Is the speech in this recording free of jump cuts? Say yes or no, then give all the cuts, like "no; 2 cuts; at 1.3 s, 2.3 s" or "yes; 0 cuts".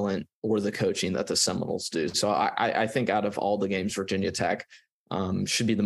yes; 0 cuts